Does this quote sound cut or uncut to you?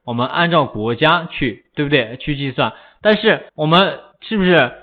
cut